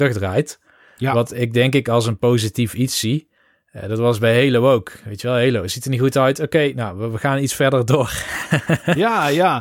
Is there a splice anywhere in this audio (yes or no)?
no